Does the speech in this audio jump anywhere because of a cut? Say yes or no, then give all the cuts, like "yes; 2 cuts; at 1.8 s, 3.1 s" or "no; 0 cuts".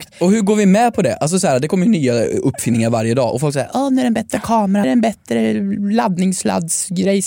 yes; 1 cut; at 4.8 s